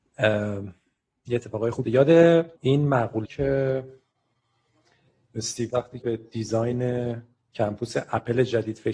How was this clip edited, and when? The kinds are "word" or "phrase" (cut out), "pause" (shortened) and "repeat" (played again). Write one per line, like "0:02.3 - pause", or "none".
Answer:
0:01.8 - word
0:02.6 - pause
0:03.2 - word
0:05.7 - word
0:06.0 - word
0:07.4 - pause

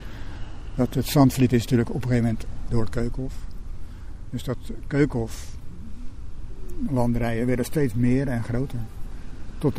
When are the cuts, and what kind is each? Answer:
0:02.7 - word

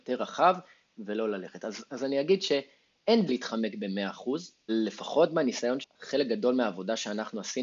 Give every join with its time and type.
0:01.9 - word
0:03.3 - word
0:04.7 - word
0:05.8 - word

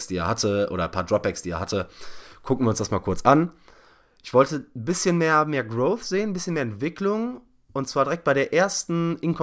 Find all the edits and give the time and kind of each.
none

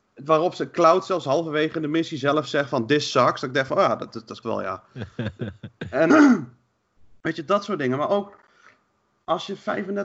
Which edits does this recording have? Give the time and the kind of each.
0:04.4 - word
0:06.1 - word

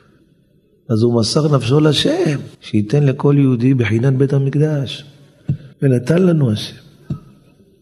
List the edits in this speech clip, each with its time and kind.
0:02.5 - pause
0:05.7 - pause

